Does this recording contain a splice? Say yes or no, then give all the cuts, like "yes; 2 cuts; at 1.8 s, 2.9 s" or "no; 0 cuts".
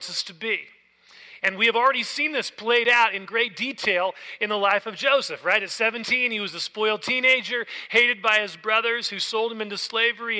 no; 0 cuts